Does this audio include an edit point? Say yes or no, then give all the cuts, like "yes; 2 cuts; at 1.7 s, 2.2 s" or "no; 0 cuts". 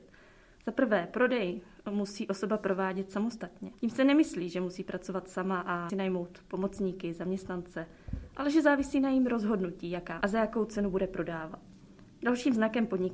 yes; 3 cuts; at 3.8 s, 5.9 s, 10.2 s